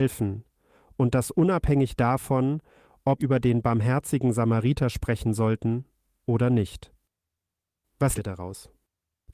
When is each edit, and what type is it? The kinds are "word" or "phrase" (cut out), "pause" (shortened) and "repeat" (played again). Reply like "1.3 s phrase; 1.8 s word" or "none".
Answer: 3.2 s word; 8.2 s word

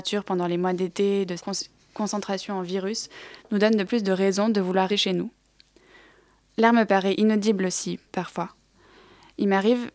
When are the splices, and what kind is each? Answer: 1.4 s word; 3.9 s phrase; 4.9 s word

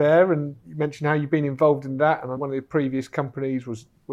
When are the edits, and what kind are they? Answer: 2.4 s word

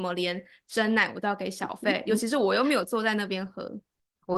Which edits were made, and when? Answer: none

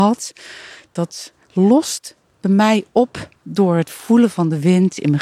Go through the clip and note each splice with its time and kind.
3.4 s pause

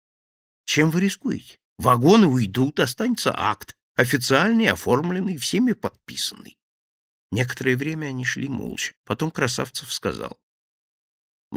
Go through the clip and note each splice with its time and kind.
1.7 s pause; 9.0 s pause

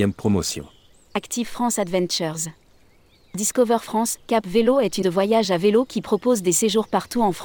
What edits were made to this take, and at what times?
0.9 s pause; 5.0 s word

